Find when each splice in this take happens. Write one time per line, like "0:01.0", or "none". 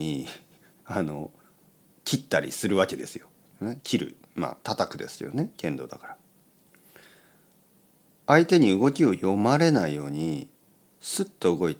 0:04.6